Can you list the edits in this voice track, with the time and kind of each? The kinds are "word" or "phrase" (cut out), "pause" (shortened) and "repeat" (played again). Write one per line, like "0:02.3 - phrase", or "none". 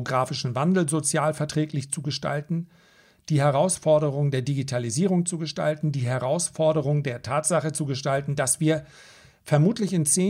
none